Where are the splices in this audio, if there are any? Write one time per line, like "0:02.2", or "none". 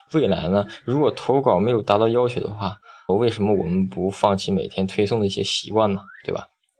0:03.1